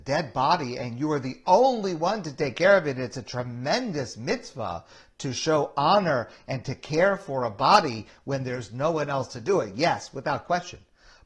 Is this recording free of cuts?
yes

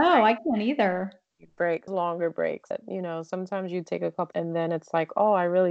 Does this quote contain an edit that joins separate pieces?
yes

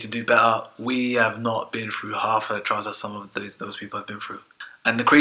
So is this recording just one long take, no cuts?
yes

